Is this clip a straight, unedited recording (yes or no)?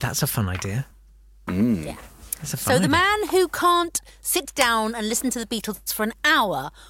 yes